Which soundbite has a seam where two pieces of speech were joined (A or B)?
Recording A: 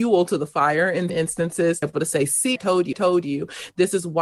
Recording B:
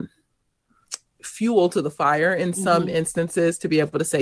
A